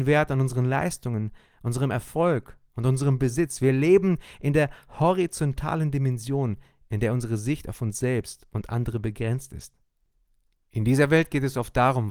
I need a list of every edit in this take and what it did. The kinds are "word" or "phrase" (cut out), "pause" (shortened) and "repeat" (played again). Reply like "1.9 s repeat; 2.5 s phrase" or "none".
none